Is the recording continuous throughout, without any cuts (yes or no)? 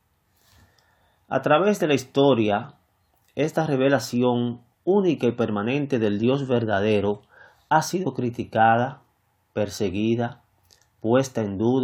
yes